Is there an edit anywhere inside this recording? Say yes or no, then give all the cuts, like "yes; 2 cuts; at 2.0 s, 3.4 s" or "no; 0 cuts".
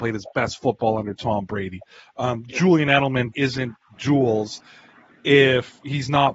yes; 1 cut; at 3.3 s